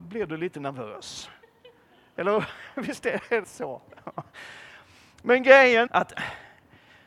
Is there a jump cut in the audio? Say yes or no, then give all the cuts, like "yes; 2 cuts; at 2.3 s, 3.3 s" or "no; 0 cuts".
yes; 2 cuts; at 3.4 s, 5.9 s